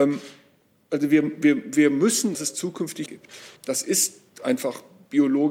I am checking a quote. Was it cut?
yes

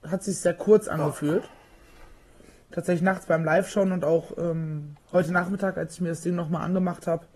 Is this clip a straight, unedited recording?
yes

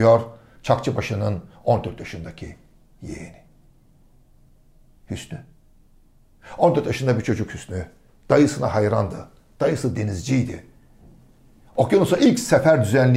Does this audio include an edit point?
no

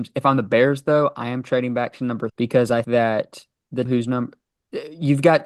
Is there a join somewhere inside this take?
yes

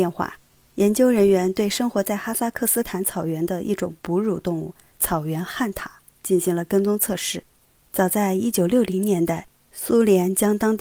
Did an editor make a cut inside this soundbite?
no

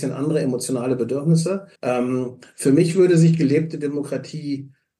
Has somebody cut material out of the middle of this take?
yes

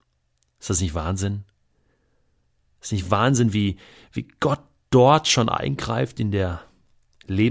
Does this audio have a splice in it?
no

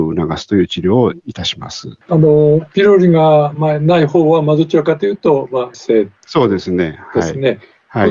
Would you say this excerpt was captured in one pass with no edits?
no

